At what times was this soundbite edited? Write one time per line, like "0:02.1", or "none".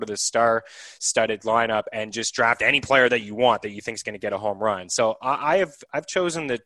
none